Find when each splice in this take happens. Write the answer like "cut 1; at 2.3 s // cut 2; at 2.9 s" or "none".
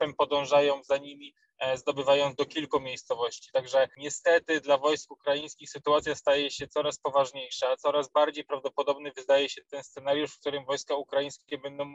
cut 1; at 2.4 s